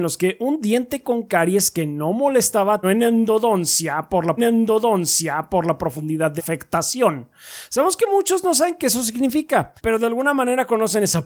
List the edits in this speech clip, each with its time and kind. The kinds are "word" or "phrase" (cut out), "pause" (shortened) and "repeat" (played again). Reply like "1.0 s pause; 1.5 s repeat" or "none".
2.8 s word; 4.4 s repeat; 6.4 s word; 9.8 s pause